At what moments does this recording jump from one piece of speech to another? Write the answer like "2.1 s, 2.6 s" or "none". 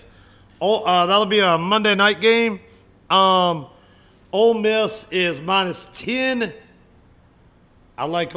none